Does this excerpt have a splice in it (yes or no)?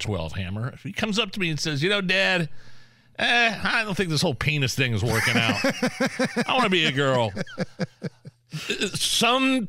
no